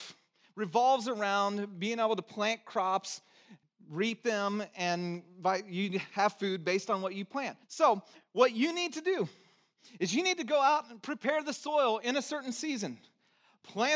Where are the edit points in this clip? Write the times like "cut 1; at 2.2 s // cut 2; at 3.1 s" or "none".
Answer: cut 1; at 3.6 s // cut 2; at 7.6 s